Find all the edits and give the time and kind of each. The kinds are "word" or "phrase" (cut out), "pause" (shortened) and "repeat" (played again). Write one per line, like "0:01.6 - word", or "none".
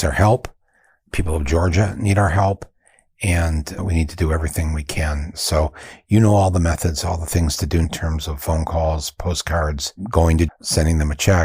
0:03.8 - word
0:07.8 - word
0:10.5 - word